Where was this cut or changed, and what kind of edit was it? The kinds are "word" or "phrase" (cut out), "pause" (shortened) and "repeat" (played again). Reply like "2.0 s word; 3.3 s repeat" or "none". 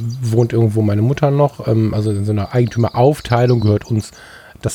none